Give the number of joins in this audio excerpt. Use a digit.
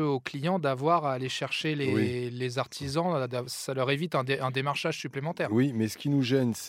1